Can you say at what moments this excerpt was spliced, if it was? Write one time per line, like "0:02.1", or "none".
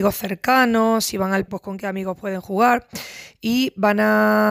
0:01.5